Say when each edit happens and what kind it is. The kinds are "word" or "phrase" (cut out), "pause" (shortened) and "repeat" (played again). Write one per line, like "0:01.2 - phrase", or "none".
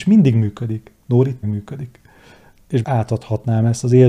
0:01.4 - word
0:02.8 - word